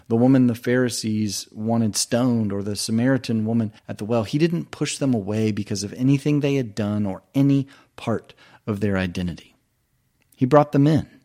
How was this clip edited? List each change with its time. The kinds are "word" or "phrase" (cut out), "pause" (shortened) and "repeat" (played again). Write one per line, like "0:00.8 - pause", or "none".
0:03.8 - pause